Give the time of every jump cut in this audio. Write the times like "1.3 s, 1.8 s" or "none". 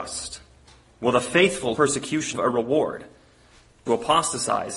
1.8 s, 2.3 s, 3.9 s